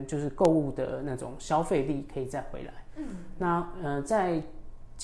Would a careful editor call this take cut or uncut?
uncut